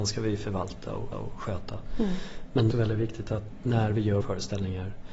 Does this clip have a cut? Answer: yes; 3 cuts; at 1.1 s, 2.7 s, 4.2 s

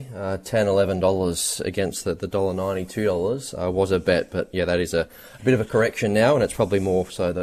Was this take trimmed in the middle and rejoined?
no; 0 cuts

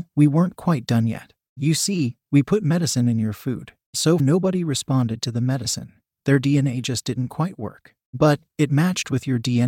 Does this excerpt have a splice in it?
yes; 1 cut; at 4.2 s

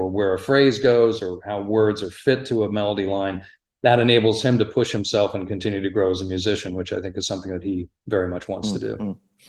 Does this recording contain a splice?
no; 0 cuts

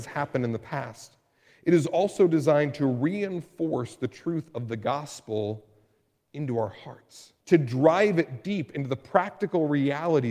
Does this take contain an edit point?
yes; 1 cut; at 7.4 s

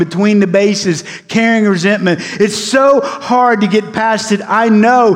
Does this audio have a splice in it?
no; 0 cuts

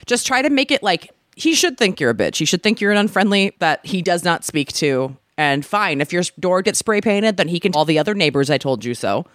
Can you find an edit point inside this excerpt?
yes; 4 cuts; at 1.2 s, 3.5 s, 6.6 s, 7.7 s

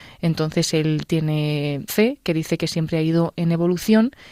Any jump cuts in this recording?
yes; 1 cut; at 1.9 s

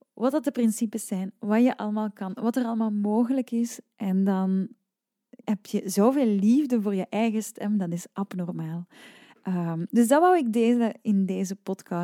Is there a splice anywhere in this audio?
no; 0 cuts

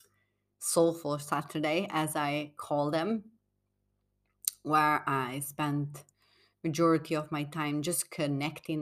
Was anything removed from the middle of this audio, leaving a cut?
no; 0 cuts

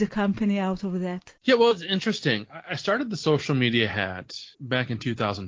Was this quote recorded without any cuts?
no; 2 cuts; at 1.4 s, 4.5 s

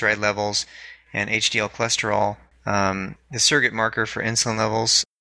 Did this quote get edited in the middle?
no; 0 cuts

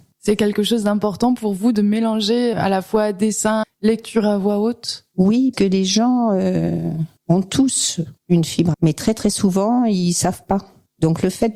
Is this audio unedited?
no; 6 cuts; at 2.5 s, 3.6 s, 5.5 s, 7.2 s, 8.2 s, 8.7 s

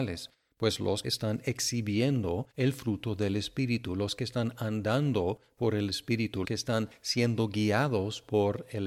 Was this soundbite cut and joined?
yes; 3 cuts; at 1.0 s, 2.5 s, 6.4 s

